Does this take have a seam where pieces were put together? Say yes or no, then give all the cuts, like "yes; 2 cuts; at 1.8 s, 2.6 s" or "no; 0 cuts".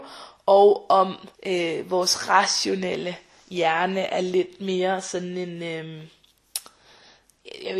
yes; 1 cut; at 1.3 s